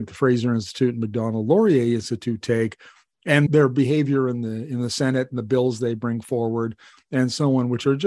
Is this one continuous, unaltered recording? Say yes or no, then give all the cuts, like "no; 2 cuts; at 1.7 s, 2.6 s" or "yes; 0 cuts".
no; 1 cut; at 3.5 s